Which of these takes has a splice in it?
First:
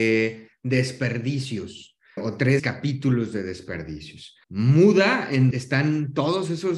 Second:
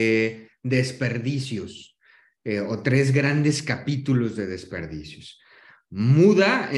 first; 4 cuts; at 2.2 s, 2.6 s, 4.4 s, 5.5 s

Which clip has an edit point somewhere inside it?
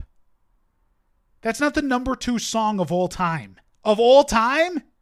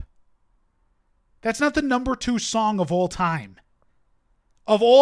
first; 1 cut; at 3.7 s

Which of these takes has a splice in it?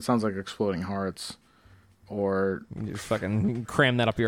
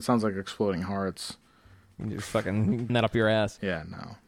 second; 2 cuts; at 2.0 s, 2.9 s

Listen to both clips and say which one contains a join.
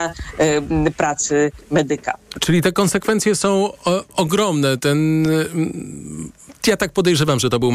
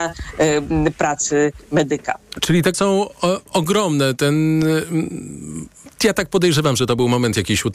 second; 1 cut; at 2.7 s

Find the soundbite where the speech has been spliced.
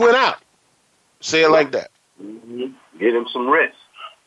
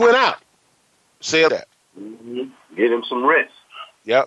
second; 1 cut; at 1.5 s

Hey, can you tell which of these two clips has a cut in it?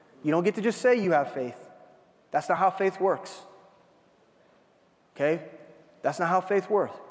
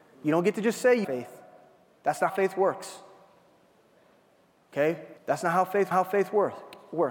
second; 4 cuts; at 1.0 s, 2.3 s, 5.2 s, 5.9 s

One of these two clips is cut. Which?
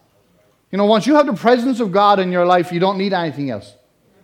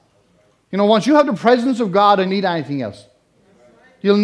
second; 1 cut; at 2.3 s

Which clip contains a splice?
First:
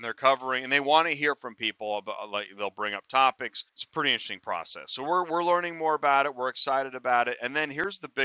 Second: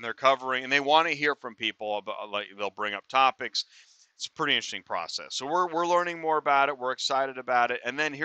first; 1 cut; at 3.7 s

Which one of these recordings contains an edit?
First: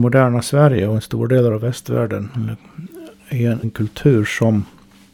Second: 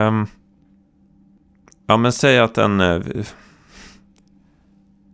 first; 1 cut; at 3.6 s

